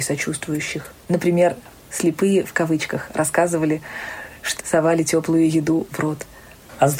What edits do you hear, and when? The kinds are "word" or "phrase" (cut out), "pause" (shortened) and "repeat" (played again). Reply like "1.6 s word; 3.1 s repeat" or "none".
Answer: 4.6 s word

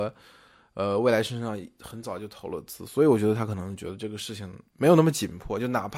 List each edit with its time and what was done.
4.7 s pause

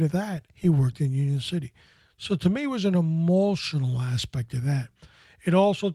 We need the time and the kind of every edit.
none

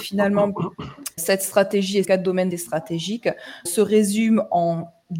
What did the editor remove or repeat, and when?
1.2 s word; 2.0 s word; 2.5 s word; 3.7 s word

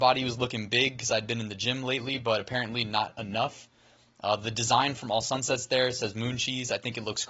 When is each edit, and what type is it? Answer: none

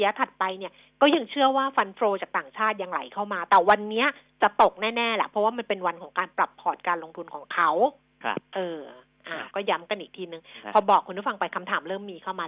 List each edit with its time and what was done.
none

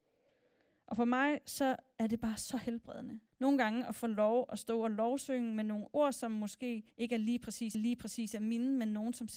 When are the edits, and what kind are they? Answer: 3.3 s pause; 6.9 s pause; 7.7 s repeat

